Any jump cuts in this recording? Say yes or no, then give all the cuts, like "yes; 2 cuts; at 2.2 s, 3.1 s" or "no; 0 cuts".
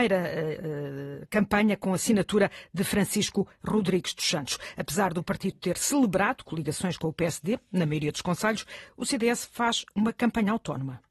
no; 0 cuts